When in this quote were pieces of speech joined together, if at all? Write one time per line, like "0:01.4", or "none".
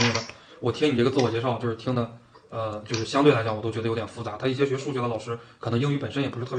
none